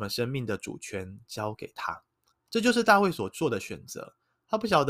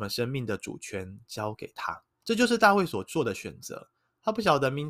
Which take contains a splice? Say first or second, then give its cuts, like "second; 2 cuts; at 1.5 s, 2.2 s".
second; 1 cut; at 2.1 s